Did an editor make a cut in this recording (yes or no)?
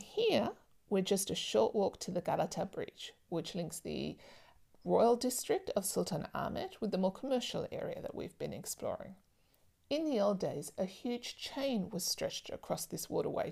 no